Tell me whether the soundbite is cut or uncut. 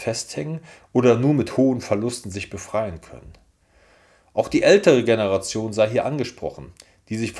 uncut